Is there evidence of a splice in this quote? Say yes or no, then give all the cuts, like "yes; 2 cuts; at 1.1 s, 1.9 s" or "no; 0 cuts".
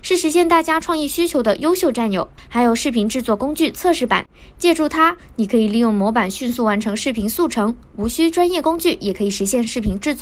no; 0 cuts